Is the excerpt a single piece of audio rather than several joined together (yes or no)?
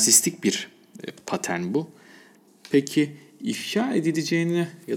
yes